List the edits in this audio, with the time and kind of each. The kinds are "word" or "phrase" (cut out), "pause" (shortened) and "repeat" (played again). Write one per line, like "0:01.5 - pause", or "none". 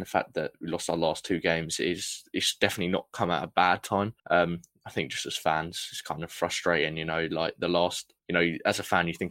0:04.2 - pause
0:08.2 - pause